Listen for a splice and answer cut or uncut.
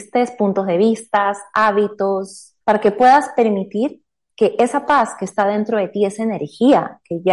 cut